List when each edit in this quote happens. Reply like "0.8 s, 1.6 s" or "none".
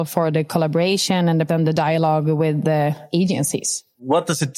1.5 s